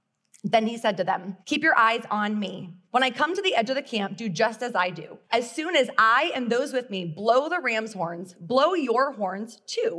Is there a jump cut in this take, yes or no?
yes